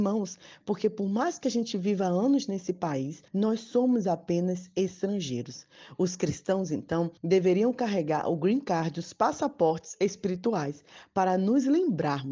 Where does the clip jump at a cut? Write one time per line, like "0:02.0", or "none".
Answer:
0:03.3
0:07.2